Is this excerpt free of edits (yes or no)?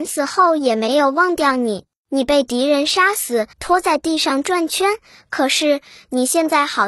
no